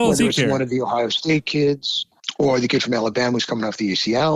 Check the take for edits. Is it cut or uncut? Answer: uncut